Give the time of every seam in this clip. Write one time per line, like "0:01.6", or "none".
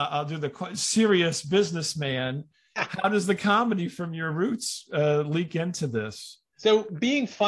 none